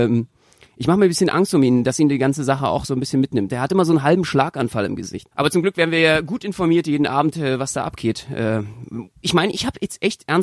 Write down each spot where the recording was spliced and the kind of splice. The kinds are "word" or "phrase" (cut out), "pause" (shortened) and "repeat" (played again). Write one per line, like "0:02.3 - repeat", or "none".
0:05.3 - pause
0:09.2 - word